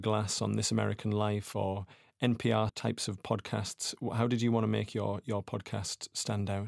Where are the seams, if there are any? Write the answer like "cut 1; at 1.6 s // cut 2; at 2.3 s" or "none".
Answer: cut 1; at 2.7 s